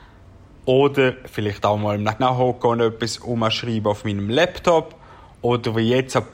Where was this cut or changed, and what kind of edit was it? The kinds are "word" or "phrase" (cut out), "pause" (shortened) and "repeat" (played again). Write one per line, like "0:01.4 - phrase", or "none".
0:02.2 - phrase